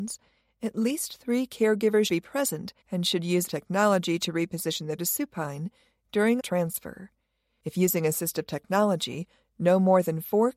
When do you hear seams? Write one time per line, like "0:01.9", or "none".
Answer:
0:02.1
0:02.8
0:03.5
0:05.0
0:06.4

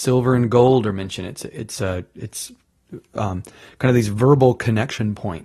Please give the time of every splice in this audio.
none

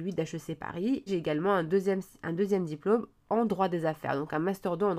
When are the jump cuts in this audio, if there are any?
0:01.1

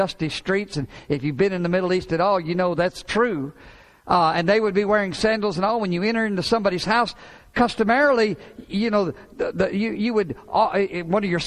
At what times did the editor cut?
none

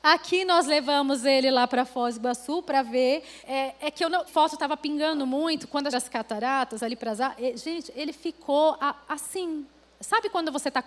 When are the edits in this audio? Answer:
0:03.4
0:04.3
0:05.9

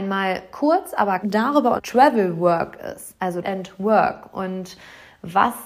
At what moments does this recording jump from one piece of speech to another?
0:01.2
0:01.8
0:03.4

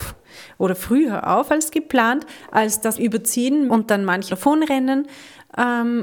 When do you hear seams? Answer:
0:03.0
0:03.7
0:04.3

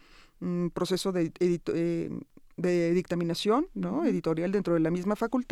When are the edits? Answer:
none

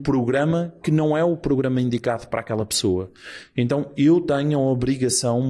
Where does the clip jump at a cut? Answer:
none

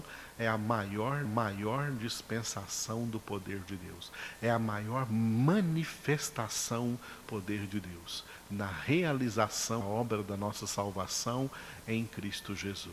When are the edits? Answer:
0:01.2
0:07.2
0:09.8

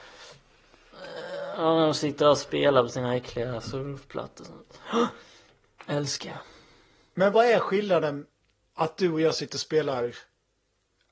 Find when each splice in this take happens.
none

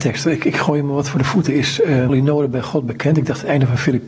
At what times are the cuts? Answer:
0:02.1

